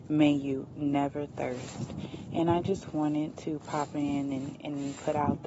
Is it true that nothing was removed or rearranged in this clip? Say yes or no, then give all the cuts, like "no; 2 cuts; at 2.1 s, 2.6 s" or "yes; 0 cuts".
yes; 0 cuts